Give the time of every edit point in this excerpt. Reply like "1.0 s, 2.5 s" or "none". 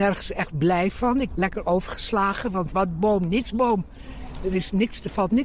1.3 s, 2.7 s